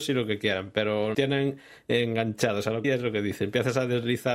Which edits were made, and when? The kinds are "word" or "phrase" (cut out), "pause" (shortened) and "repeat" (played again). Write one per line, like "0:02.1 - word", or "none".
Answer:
0:01.1 - word
0:02.8 - phrase